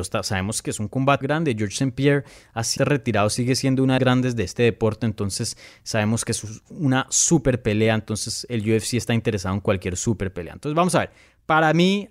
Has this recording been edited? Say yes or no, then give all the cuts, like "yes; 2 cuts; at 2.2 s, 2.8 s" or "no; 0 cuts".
yes; 3 cuts; at 1.2 s, 2.8 s, 4.0 s